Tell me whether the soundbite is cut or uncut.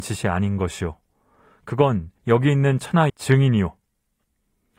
cut